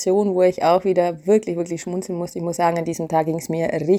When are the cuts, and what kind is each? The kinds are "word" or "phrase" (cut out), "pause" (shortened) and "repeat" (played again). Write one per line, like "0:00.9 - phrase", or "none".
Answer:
none

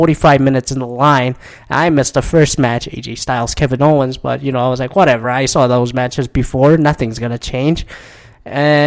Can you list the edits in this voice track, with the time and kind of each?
none

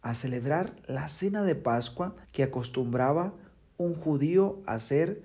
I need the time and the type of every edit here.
0:02.2 - pause

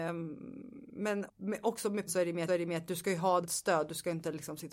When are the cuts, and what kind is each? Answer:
0:01.3 - word
0:02.1 - word
0:02.5 - repeat
0:03.4 - phrase

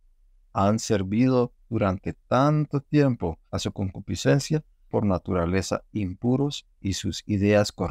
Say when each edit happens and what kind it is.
0:03.5 - pause
0:04.9 - phrase

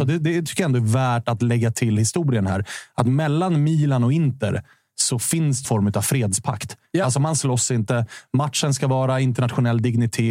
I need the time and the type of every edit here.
0:05.6 - phrase

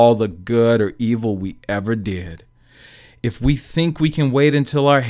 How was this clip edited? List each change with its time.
none

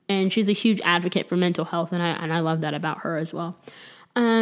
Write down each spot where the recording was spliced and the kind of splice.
none

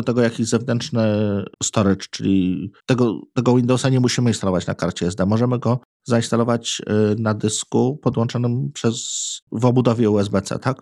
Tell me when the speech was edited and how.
0:01.5 - pause
0:02.8 - pause
0:09.4 - pause

